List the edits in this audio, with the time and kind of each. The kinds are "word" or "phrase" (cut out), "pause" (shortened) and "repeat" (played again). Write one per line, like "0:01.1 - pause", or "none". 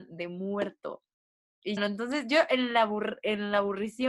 0:01.8 - word